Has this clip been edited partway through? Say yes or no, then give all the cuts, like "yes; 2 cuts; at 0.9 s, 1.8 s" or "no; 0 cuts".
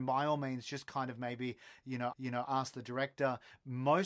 yes; 1 cut; at 2.1 s